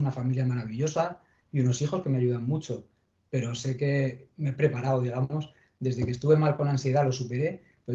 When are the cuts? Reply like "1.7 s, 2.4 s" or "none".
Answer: none